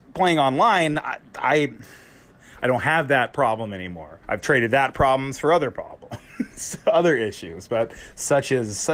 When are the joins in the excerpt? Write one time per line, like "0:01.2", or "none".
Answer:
0:04.2